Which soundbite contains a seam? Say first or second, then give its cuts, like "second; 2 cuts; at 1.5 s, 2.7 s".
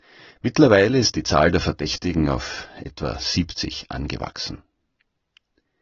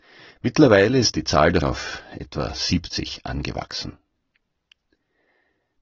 second; 1 cut; at 1.6 s